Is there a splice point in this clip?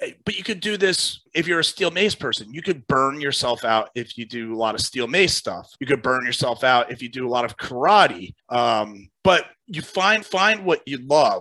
yes; 4 cuts; at 1.3 s, 5.8 s, 8.4 s, 10.2 s

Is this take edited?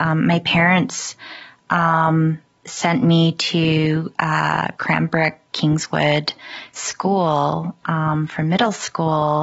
no; 0 cuts

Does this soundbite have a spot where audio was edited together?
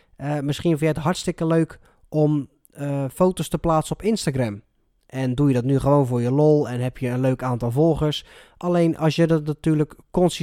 no; 0 cuts

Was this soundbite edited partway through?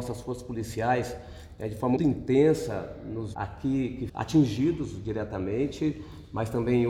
yes; 3 cuts; at 2.0 s, 3.3 s, 4.1 s

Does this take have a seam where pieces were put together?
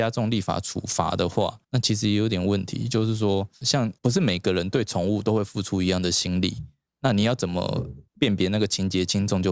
yes; 3 cuts; at 1.6 s, 4.0 s, 8.1 s

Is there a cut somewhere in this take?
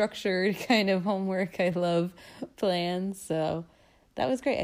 no; 0 cuts

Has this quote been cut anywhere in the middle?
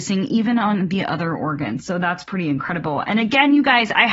no; 0 cuts

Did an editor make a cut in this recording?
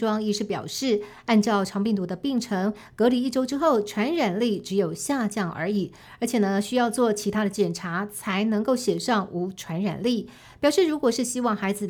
no; 0 cuts

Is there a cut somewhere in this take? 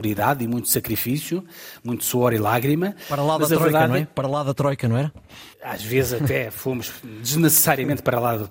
yes; 1 cut; at 5.5 s

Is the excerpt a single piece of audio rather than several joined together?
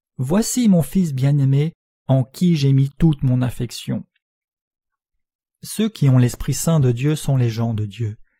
yes; 0 cuts

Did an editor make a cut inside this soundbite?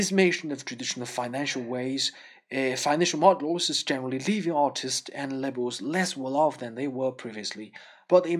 no; 0 cuts

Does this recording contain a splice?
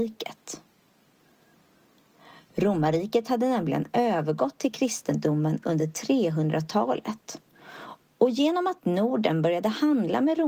no; 0 cuts

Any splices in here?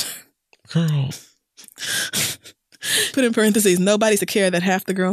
yes; 2 cuts; at 3.1 s, 4.2 s

